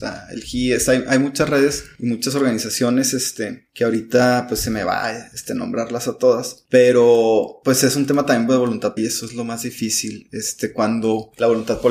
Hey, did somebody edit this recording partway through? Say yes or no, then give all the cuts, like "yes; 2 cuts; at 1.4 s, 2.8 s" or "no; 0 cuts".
yes; 1 cut; at 9.0 s